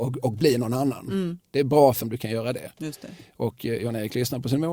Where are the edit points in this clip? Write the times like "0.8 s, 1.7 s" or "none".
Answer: 2.0 s